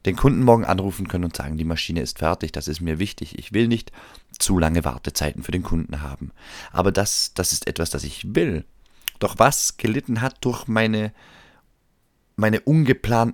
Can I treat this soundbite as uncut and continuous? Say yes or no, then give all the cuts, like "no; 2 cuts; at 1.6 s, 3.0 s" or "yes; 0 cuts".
yes; 0 cuts